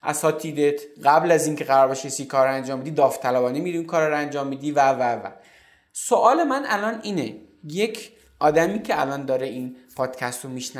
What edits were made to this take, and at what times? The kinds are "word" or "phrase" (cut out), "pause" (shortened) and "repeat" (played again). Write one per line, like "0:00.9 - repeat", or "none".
none